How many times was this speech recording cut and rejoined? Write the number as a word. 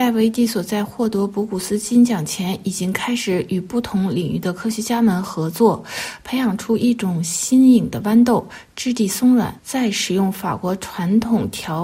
one